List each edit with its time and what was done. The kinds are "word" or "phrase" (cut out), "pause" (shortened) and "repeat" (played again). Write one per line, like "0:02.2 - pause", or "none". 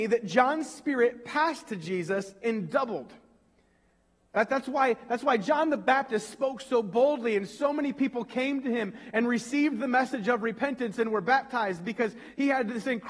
none